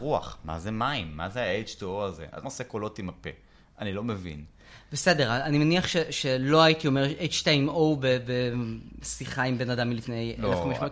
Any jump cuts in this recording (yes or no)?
yes